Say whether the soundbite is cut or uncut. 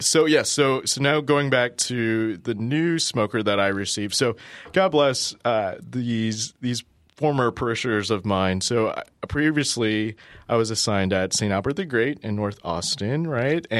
uncut